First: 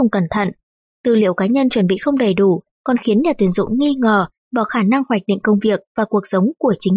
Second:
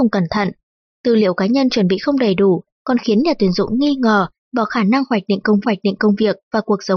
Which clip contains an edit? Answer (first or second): second